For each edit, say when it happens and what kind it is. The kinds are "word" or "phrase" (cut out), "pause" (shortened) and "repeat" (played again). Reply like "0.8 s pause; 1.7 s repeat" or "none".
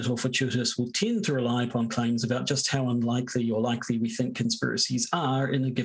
none